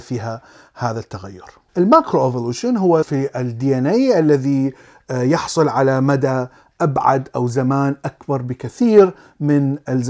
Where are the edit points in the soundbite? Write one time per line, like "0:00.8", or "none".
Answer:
0:01.7
0:03.0